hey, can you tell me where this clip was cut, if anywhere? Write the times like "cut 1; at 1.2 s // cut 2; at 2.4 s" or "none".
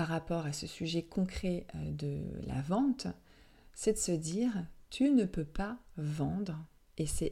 none

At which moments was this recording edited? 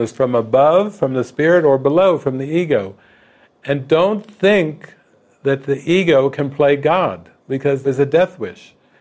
cut 1; at 7.4 s // cut 2; at 7.8 s

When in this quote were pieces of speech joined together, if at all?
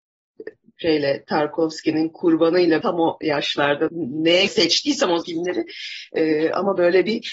cut 1; at 2.8 s // cut 2; at 3.9 s // cut 3; at 4.5 s // cut 4; at 5.2 s

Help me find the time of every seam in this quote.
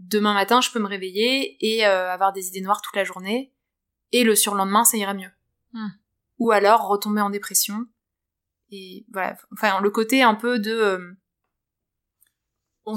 none

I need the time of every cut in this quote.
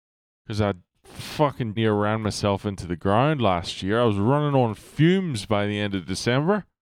cut 1; at 1.8 s

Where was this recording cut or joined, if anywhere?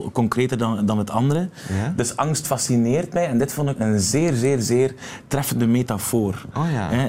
cut 1; at 3.8 s

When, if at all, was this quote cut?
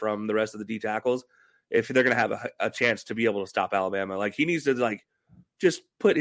none

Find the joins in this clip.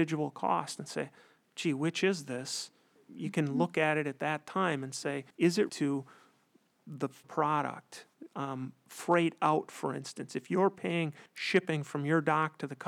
cut 1; at 3.0 s // cut 2; at 5.3 s // cut 3; at 5.7 s // cut 4; at 7.2 s // cut 5; at 11.3 s

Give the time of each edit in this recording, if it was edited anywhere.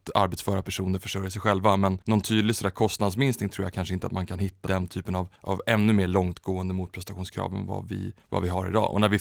cut 1; at 2.0 s // cut 2; at 4.7 s // cut 3; at 5.4 s // cut 4; at 8.2 s

